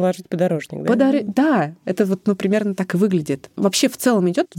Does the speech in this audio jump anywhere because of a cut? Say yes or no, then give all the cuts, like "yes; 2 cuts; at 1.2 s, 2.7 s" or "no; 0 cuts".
no; 0 cuts